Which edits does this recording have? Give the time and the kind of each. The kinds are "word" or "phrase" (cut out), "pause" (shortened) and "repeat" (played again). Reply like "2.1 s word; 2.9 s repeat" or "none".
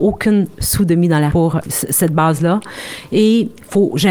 1.3 s word; 1.6 s word